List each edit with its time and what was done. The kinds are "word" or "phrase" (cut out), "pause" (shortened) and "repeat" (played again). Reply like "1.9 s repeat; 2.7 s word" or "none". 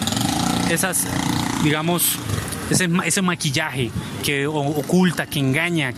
none